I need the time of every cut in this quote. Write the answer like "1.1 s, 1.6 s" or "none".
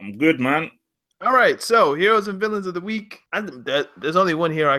3.3 s